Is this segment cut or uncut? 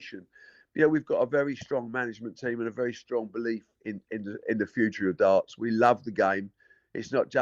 uncut